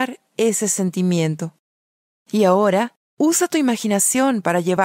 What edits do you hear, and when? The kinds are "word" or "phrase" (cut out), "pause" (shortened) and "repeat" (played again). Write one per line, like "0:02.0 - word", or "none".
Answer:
none